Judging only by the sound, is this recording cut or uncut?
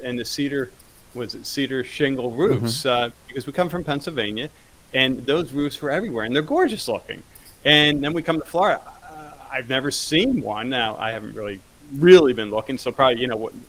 uncut